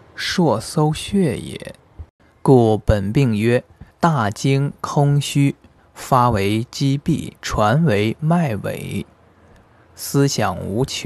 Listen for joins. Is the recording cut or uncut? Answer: cut